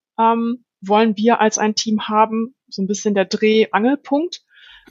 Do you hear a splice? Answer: yes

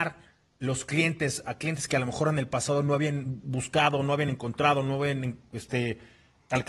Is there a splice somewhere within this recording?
no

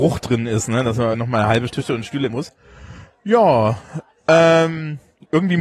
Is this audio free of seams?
no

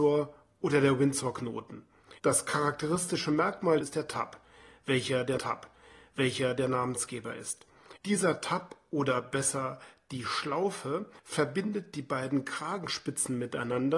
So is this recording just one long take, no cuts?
no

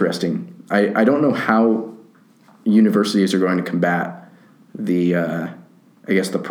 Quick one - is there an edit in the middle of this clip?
no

